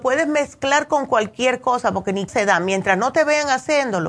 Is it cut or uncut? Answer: cut